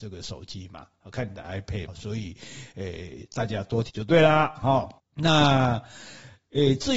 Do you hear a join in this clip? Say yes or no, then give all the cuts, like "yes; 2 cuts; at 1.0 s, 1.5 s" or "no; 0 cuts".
yes; 3 cuts; at 1.9 s, 3.9 s, 5.0 s